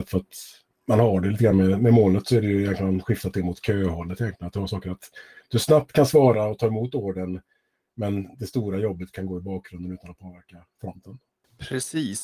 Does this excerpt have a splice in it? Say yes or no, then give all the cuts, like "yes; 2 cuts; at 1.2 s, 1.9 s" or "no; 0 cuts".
no; 0 cuts